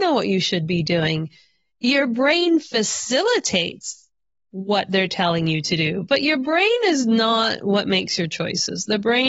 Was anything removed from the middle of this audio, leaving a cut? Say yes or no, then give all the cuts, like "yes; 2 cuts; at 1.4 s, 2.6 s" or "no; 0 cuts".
no; 0 cuts